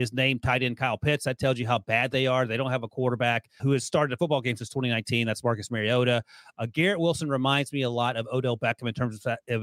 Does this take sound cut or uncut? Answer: cut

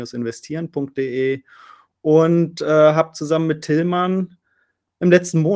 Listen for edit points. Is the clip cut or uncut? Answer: uncut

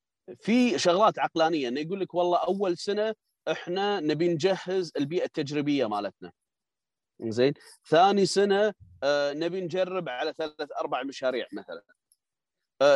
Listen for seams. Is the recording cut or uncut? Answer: uncut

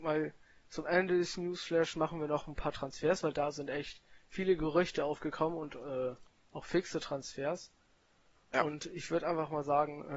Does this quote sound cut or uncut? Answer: uncut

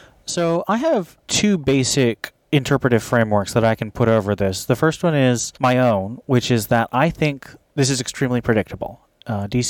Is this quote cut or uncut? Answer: cut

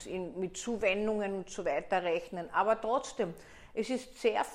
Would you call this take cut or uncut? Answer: uncut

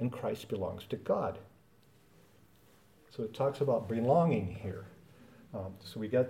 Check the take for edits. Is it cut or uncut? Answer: uncut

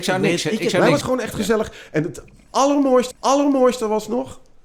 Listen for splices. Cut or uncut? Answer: cut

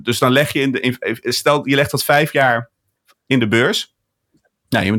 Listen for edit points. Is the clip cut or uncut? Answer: uncut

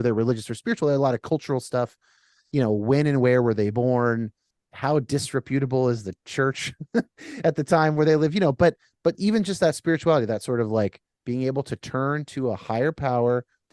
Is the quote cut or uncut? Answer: cut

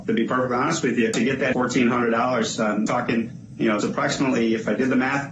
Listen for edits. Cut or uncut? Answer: cut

